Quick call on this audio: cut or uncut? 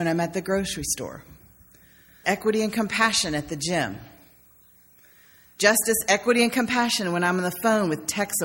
cut